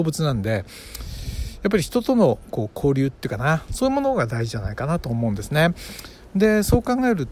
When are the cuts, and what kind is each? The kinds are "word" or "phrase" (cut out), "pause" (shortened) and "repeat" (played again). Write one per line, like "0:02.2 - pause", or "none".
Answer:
none